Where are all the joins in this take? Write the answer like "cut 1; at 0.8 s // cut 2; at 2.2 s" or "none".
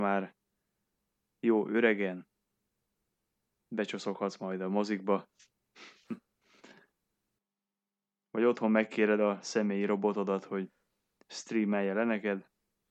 none